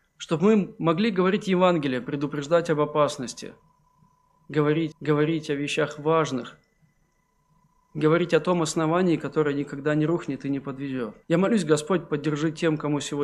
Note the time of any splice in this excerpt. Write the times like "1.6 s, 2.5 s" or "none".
4.9 s, 11.2 s